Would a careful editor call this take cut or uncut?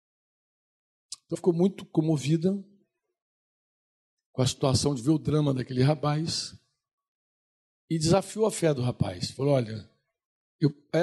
cut